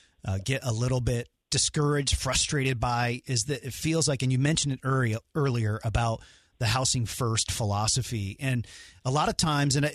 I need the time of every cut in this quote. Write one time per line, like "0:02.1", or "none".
0:01.5

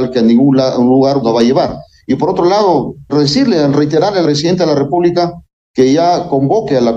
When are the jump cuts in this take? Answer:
0:01.2
0:03.1
0:04.2

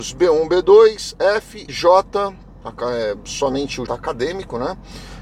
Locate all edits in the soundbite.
0:01.7
0:03.9

